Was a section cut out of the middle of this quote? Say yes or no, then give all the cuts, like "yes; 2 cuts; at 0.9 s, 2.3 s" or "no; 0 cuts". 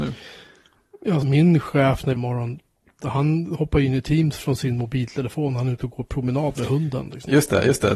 yes; 3 cuts; at 1.2 s, 2.2 s, 3.0 s